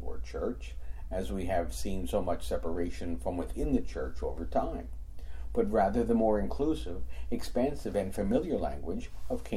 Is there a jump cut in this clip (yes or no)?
no